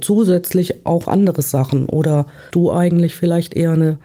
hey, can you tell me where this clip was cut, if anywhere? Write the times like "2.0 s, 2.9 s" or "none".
1.0 s, 2.5 s